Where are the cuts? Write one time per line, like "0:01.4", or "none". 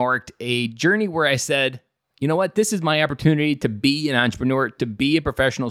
none

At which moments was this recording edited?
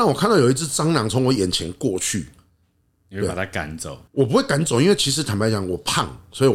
0:04.1

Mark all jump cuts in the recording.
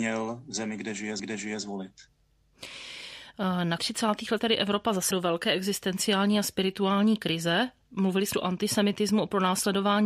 0:01.2
0:03.8
0:04.4
0:05.1
0:08.3

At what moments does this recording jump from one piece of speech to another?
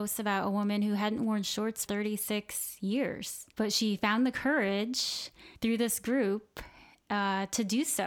0:01.9
0:03.5
0:05.5

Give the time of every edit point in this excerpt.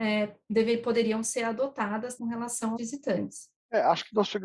0:02.2
0:02.8

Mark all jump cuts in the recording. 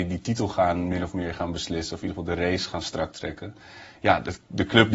none

